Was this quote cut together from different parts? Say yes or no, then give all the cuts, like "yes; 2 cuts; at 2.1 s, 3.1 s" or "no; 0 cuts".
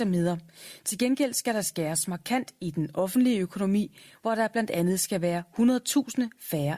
no; 0 cuts